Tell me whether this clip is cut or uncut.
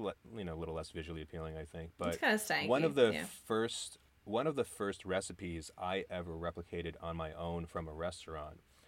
cut